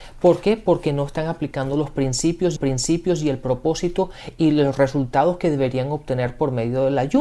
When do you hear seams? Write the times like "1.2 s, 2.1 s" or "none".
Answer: 2.6 s